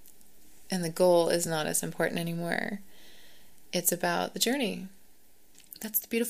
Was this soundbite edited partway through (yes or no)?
no